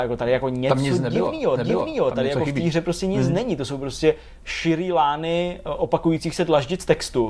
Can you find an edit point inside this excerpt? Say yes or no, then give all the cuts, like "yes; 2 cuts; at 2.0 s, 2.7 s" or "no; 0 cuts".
yes; 1 cut; at 1.6 s